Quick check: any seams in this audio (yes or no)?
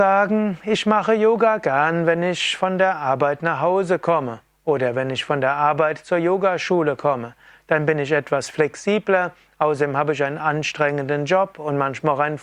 no